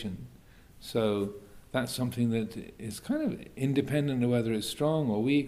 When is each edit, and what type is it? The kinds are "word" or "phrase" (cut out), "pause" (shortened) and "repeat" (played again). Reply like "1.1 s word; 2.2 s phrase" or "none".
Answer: 1.7 s word